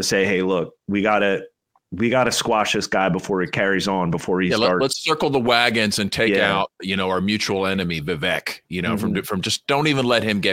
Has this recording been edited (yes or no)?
no